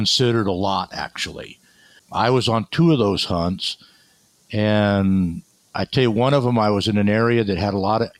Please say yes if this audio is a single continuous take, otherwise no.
yes